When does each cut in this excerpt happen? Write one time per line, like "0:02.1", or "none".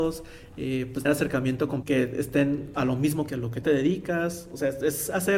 0:01.0
0:01.8
0:02.7
0:03.3
0:03.6